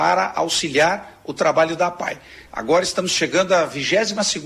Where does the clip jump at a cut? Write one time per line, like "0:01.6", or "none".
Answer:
none